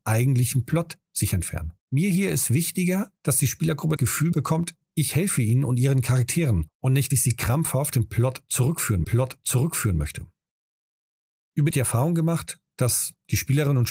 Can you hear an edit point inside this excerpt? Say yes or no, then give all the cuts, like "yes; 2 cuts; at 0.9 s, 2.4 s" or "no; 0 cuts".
yes; 7 cuts; at 1.8 s, 3.2 s, 4.0 s, 7.1 s, 7.9 s, 9.0 s, 11.7 s